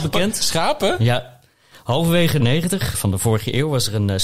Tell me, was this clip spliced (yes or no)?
yes